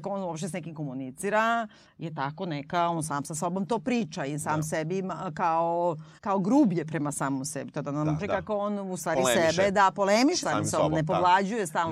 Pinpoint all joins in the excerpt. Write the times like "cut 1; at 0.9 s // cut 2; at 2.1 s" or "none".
cut 1; at 6.2 s // cut 2; at 8.2 s // cut 3; at 10.4 s